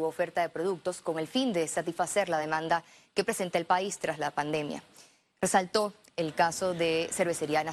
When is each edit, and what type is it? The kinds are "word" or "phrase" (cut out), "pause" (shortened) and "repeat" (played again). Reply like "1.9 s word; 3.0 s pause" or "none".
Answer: none